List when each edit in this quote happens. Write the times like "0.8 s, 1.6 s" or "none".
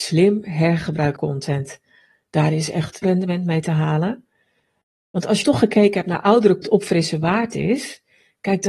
1.2 s, 3.0 s, 5.4 s, 6.6 s